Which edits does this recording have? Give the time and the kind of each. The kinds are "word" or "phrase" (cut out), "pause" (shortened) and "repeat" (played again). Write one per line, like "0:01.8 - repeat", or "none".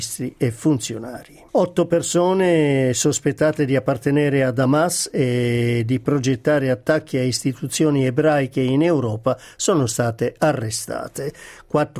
0:01.5 - pause